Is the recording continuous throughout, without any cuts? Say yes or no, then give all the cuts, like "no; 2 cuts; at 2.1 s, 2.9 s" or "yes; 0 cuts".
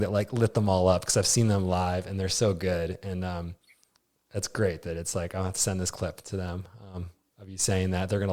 yes; 0 cuts